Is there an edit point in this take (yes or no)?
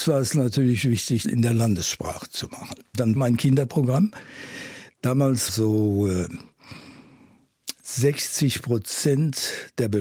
yes